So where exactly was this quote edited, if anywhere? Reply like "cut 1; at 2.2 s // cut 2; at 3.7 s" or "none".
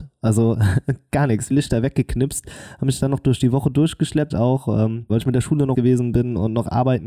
cut 1; at 1.5 s // cut 2; at 4.3 s // cut 3; at 5.1 s // cut 4; at 5.7 s